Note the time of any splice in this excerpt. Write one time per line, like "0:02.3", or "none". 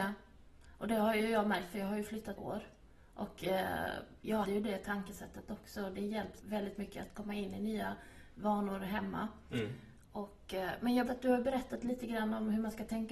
0:02.4
0:04.4
0:06.4
0:11.1